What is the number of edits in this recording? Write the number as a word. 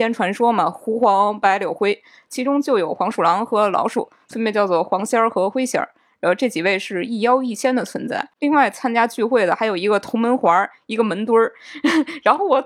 zero